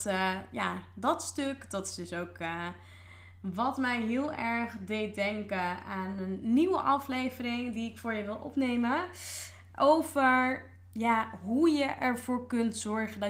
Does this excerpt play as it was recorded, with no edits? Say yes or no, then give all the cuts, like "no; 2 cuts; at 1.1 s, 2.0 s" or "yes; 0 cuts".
yes; 0 cuts